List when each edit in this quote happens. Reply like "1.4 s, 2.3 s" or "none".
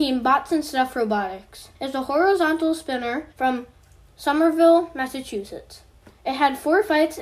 1.7 s, 3.3 s, 6.0 s